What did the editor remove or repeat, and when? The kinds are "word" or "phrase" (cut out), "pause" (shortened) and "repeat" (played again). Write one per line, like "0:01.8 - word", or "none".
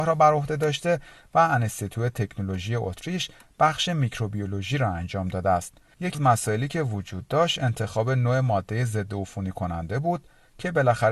0:06.1 - word

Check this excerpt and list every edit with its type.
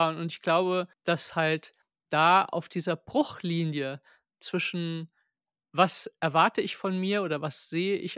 0:00.9 - pause

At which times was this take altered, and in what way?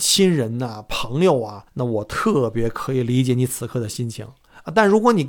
0:01.7 - pause

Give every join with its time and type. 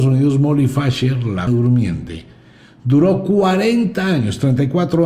0:01.5 - word

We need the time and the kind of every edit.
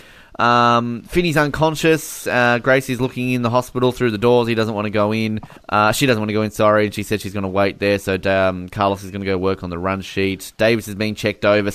0:05.6 - pause

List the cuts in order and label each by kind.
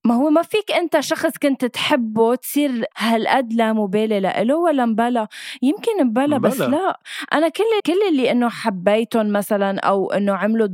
0:02.9 - pause
0:07.8 - word

